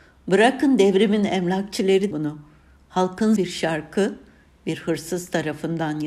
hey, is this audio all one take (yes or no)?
no